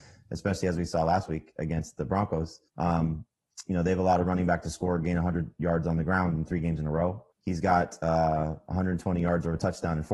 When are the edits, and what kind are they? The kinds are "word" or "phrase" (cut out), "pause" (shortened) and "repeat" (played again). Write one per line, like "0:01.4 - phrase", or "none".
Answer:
0:02.7 - pause
0:07.3 - pause